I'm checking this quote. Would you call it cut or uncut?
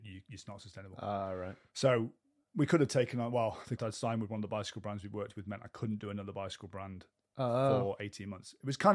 cut